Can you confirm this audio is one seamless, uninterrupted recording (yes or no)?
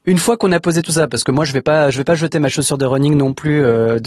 yes